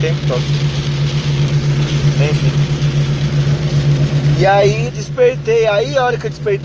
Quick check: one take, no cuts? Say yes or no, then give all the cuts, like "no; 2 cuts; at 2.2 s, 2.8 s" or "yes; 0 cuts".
no; 1 cut; at 4.9 s